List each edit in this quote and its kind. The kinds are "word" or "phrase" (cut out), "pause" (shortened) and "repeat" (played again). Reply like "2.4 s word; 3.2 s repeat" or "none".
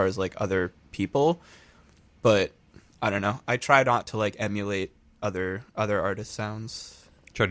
none